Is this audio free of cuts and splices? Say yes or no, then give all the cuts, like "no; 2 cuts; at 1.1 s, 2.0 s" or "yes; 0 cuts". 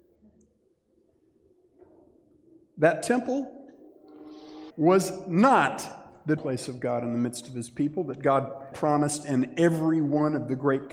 no; 3 cuts; at 4.7 s, 6.4 s, 8.7 s